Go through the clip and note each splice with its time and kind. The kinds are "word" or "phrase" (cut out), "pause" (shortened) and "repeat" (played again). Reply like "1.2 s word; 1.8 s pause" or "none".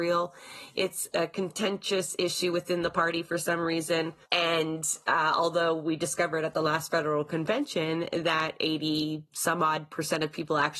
4.2 s pause